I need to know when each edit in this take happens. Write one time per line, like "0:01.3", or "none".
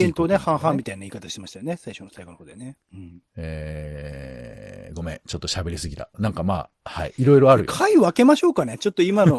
0:02.8